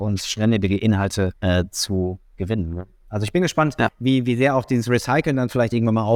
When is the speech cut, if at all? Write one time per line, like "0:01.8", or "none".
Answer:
0:01.4